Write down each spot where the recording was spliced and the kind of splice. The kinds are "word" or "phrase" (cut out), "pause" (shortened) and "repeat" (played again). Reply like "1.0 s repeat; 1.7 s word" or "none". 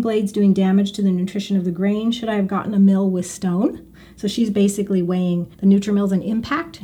5.5 s pause